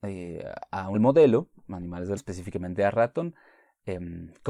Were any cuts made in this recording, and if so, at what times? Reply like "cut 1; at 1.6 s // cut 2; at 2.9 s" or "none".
cut 1; at 0.9 s // cut 2; at 2.2 s